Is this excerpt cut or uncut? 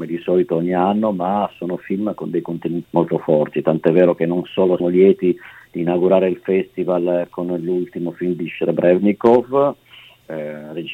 cut